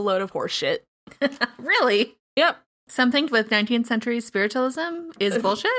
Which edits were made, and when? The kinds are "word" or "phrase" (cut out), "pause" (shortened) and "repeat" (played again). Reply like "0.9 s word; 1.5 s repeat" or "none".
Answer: 3.3 s word